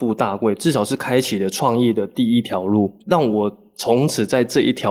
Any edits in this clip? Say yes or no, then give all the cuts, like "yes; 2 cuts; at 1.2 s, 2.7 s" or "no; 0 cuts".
yes; 1 cut; at 3.0 s